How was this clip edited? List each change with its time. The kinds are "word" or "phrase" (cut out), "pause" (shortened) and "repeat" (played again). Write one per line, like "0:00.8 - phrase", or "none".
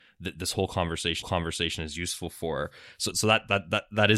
0:01.2 - repeat
0:03.1 - word